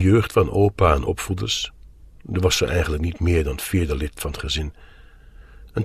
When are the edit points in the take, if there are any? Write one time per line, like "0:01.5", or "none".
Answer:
0:01.1